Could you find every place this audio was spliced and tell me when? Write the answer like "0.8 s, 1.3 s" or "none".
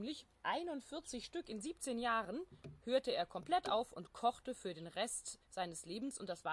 none